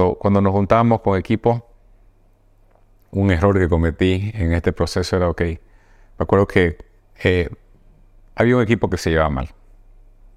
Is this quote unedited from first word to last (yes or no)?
yes